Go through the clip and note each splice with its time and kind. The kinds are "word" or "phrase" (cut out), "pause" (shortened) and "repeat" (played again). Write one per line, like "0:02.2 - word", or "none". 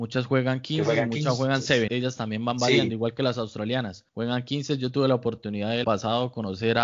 0:01.9 - word
0:04.1 - pause
0:05.8 - word